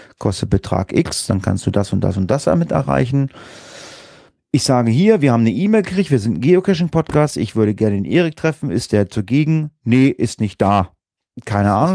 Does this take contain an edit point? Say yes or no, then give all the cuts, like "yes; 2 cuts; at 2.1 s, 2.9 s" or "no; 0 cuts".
no; 0 cuts